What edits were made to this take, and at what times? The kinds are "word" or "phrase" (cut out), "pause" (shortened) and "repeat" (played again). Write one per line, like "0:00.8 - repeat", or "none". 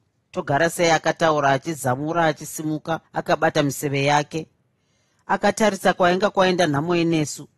none